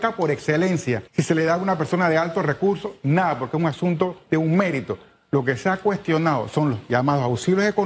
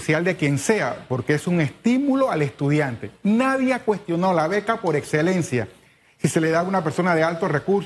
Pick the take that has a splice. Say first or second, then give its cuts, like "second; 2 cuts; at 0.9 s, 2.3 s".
first; 1 cut; at 1.1 s